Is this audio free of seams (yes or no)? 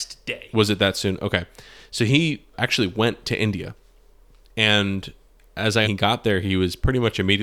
no